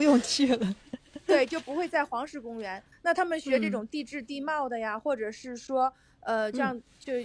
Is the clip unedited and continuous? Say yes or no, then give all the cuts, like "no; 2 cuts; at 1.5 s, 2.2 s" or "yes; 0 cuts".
yes; 0 cuts